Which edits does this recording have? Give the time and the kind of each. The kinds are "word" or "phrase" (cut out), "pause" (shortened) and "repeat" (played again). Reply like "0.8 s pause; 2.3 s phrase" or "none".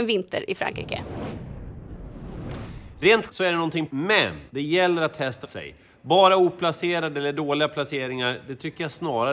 3.3 s word; 3.9 s word; 4.5 s pause; 5.4 s phrase